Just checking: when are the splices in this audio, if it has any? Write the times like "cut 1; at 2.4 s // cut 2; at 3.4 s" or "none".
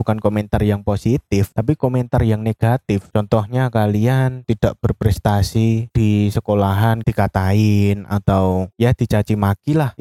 none